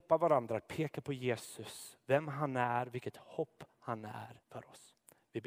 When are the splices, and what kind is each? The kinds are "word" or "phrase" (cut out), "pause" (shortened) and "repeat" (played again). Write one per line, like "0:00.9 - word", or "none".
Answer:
0:04.4 - pause